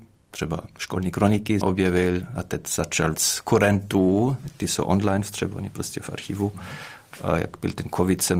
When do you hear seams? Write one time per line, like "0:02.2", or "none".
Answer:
0:01.6
0:03.1

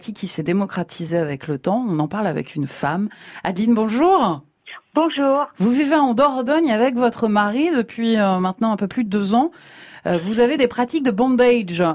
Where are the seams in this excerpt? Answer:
none

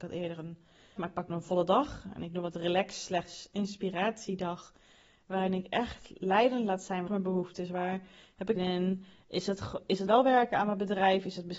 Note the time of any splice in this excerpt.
0:01.0
0:01.3
0:07.1
0:08.6
0:10.1

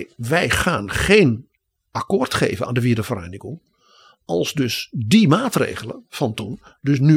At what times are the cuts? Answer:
none

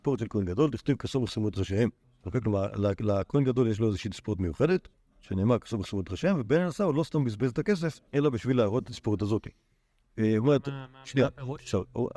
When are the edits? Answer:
0:02.0
0:04.9
0:08.1

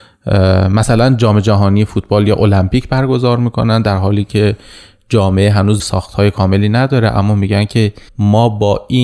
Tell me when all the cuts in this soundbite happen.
0:05.8
0:08.1

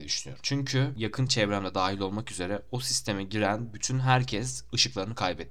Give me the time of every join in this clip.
none

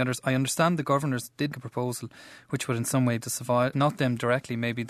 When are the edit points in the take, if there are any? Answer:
0:01.5
0:03.2
0:03.7

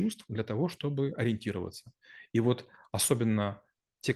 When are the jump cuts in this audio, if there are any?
none

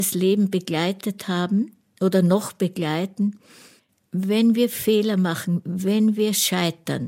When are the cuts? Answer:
none

